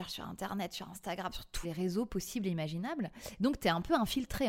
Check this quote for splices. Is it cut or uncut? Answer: cut